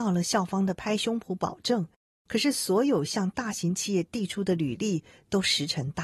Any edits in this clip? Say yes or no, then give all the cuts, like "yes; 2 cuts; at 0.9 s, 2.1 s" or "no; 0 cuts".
no; 0 cuts